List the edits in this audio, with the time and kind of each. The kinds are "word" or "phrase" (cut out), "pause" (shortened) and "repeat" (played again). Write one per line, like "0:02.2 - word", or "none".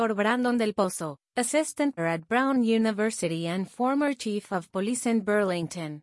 0:02.0 - word